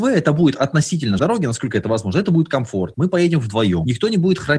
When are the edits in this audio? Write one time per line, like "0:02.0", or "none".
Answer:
0:01.2